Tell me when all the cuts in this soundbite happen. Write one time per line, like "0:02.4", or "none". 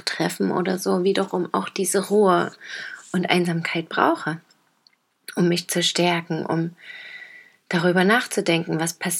none